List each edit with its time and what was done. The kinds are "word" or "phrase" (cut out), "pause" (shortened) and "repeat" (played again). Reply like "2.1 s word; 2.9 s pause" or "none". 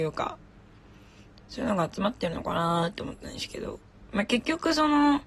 none